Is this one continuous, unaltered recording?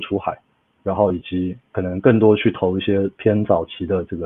no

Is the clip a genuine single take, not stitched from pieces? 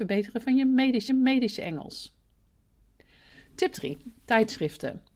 no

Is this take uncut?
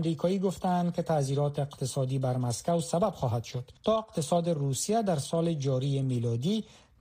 no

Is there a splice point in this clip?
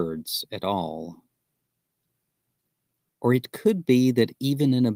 no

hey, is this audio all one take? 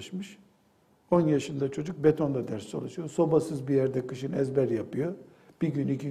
yes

